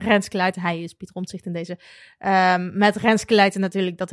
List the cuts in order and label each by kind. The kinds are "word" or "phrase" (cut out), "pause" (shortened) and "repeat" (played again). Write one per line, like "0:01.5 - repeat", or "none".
none